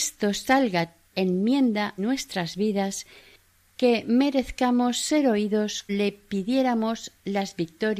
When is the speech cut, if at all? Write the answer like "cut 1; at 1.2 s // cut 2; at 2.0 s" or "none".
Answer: cut 1; at 1.1 s // cut 2; at 2.0 s // cut 3; at 5.9 s

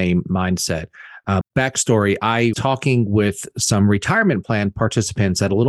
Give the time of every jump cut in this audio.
cut 1; at 1.4 s // cut 2; at 2.5 s

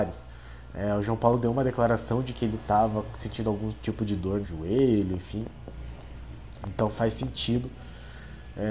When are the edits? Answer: cut 1; at 4.4 s

